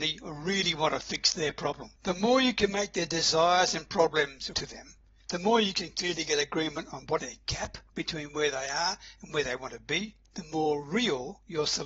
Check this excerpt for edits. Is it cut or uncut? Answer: cut